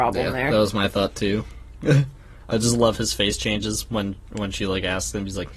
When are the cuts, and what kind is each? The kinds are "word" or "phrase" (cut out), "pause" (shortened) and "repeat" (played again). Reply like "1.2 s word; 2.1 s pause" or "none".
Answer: none